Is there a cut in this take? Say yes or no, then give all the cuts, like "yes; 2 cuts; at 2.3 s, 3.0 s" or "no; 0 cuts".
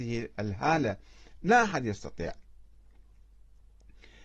yes; 1 cut; at 1.4 s